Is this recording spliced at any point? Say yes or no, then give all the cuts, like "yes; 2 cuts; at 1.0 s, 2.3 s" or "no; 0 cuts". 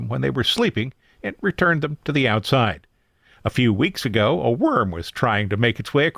no; 0 cuts